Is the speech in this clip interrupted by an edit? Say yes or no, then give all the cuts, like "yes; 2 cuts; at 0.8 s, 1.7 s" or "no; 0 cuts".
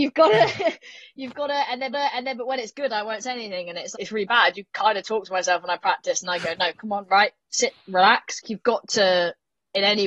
yes; 3 cuts; at 1.9 s, 3.9 s, 8.4 s